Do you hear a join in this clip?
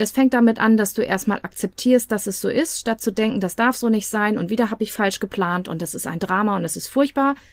no; 0 cuts

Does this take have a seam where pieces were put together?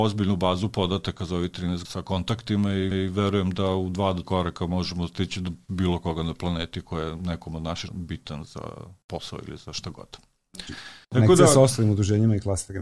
yes; 6 cuts; at 1.8 s, 2.9 s, 4.2 s, 7.9 s, 9.0 s, 11.0 s

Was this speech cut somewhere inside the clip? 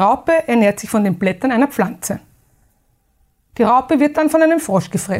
no; 0 cuts

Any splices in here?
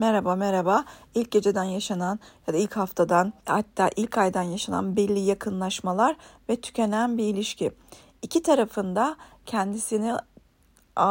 yes; 1 cut; at 3.4 s

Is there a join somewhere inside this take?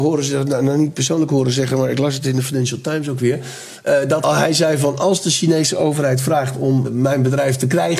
yes; 2 cuts; at 4.2 s, 6.8 s

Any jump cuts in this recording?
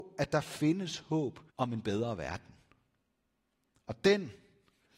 yes; 1 cut; at 1.5 s

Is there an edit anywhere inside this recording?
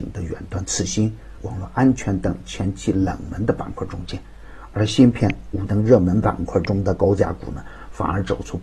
yes; 2 cuts; at 1.4 s, 5.7 s

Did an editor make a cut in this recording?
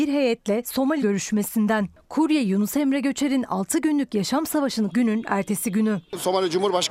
yes; 2 cuts; at 1.0 s, 4.9 s

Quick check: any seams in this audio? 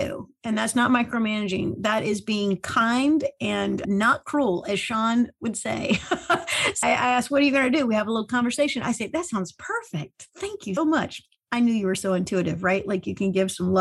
yes; 3 cuts; at 3.8 s, 6.8 s, 10.8 s

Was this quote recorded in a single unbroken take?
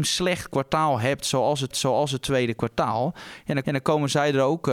no; 2 cuts; at 1.7 s, 3.6 s

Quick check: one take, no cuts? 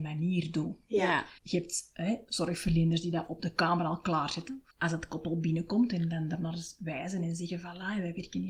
no; 2 cuts; at 1.4 s, 4.7 s

